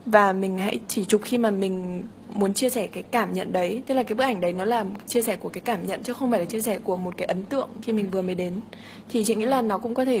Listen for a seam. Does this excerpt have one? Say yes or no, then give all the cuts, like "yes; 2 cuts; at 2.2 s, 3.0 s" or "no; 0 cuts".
no; 0 cuts